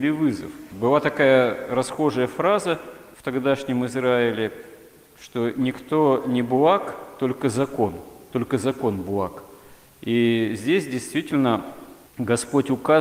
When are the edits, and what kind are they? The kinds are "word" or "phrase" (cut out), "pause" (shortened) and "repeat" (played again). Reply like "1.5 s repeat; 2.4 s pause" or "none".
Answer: none